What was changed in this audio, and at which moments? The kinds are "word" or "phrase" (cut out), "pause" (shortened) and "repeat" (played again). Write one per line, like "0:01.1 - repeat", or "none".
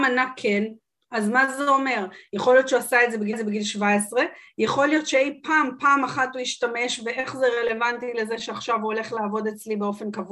0:03.3 - repeat